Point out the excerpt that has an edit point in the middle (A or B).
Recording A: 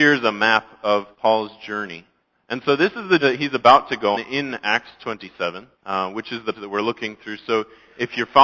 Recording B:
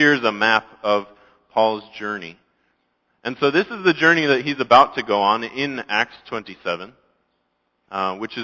A